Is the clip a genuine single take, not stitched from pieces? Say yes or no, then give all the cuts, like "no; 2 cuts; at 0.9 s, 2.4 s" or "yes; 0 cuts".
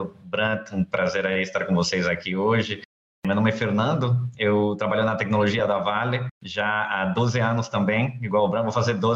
yes; 0 cuts